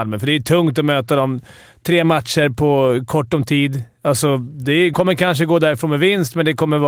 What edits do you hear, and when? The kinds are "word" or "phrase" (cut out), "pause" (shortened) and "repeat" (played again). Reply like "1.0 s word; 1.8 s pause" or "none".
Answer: 4.9 s word